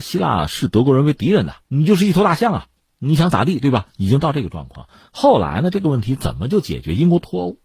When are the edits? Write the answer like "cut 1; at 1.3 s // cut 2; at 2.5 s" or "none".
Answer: cut 1; at 1.6 s